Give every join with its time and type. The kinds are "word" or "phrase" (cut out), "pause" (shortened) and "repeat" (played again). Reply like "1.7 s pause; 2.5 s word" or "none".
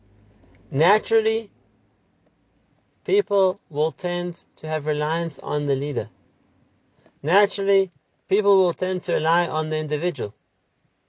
none